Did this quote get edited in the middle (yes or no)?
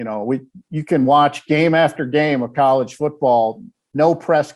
no